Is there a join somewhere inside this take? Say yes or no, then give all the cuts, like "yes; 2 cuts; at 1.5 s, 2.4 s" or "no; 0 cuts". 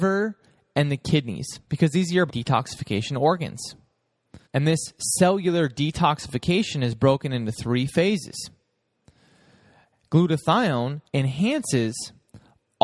yes; 4 cuts; at 1.6 s, 2.3 s, 4.4 s, 11.1 s